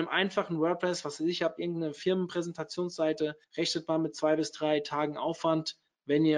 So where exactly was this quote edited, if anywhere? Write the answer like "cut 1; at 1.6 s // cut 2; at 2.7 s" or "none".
cut 1; at 3.4 s